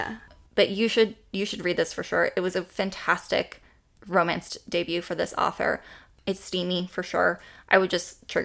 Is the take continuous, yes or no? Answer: yes